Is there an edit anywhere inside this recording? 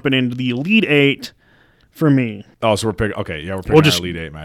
yes; 1 cut; at 2.5 s

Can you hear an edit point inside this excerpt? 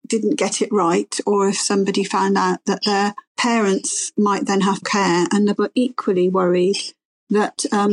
yes; 3 cuts; at 3.3 s, 4.8 s, 5.6 s

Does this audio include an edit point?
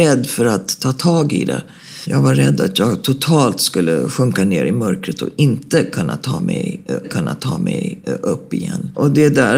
yes; 1 cut; at 7.0 s

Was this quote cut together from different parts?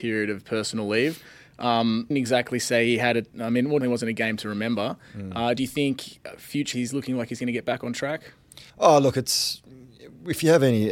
yes; 5 cuts; at 2.1 s, 3.3 s, 3.8 s, 6.7 s, 8.7 s

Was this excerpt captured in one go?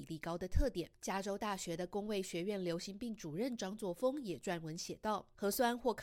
yes; 0 cuts

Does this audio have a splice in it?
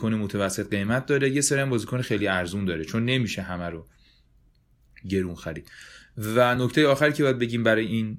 no; 0 cuts

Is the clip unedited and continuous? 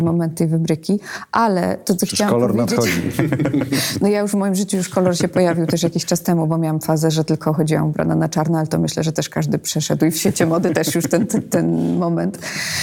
yes; 0 cuts

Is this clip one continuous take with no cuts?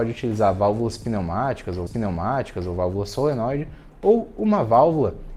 no; 1 cut; at 1.9 s

